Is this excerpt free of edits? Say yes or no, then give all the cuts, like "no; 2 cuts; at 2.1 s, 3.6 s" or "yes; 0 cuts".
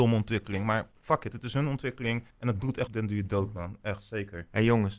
no; 2 cuts; at 2.3 s, 2.9 s